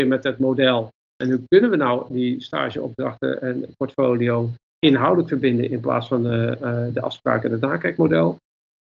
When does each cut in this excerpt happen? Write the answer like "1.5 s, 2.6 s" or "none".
none